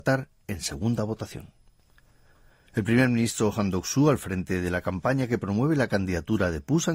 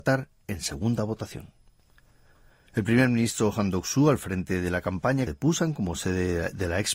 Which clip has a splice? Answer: second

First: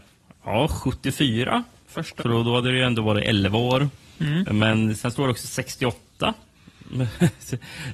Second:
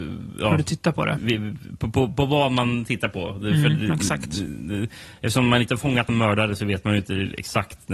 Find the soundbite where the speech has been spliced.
first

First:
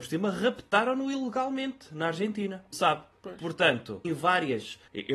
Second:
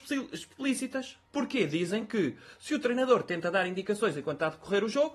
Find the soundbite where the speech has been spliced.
first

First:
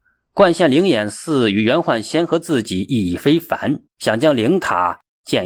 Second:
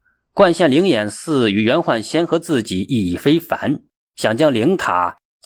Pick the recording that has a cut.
first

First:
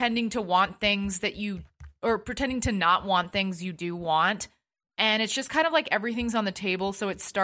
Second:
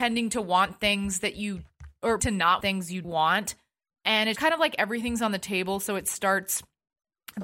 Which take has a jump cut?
second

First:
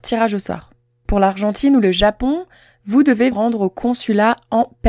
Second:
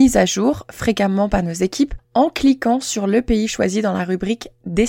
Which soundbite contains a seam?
first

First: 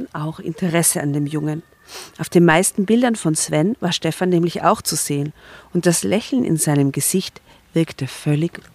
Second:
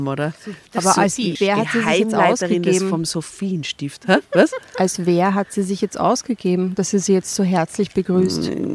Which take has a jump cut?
second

